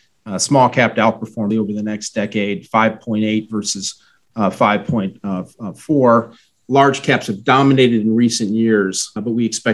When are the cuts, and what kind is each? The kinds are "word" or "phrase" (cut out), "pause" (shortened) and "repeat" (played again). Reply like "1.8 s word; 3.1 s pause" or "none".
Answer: 1.5 s word